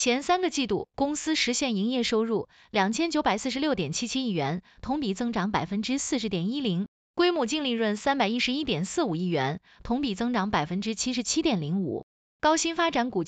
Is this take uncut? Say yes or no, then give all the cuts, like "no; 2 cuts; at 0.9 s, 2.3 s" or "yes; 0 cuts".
yes; 0 cuts